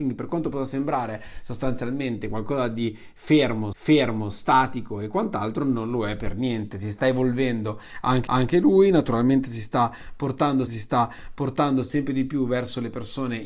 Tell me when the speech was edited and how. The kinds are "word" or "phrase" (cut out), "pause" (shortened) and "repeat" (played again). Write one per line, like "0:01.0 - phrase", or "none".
0:03.7 - repeat
0:08.3 - repeat
0:10.7 - repeat